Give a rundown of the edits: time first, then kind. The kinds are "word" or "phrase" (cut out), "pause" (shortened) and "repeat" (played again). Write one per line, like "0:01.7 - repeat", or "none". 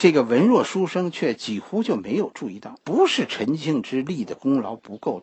0:02.8 - pause